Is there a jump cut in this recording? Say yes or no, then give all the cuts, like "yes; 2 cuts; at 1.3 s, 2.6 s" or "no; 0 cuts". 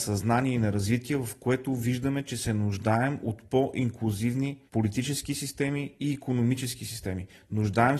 yes; 1 cut; at 4.7 s